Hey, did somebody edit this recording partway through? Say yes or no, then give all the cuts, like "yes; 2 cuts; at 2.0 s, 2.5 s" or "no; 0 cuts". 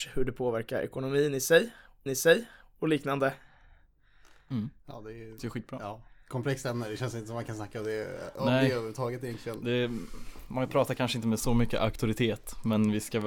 yes; 3 cuts; at 2.1 s, 4.8 s, 5.4 s